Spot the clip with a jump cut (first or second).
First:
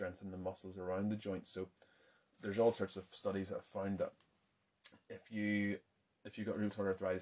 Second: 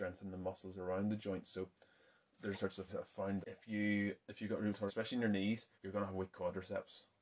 second